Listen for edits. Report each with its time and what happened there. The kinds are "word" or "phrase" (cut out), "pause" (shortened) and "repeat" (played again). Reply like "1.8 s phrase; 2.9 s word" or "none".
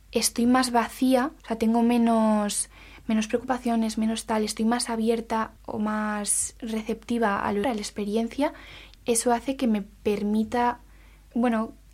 1.4 s pause; 5.6 s pause; 7.6 s word; 8.9 s word